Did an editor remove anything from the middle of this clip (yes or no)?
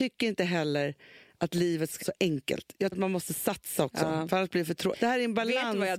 yes